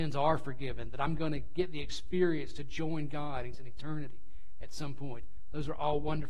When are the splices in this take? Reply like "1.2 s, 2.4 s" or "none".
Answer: 3.5 s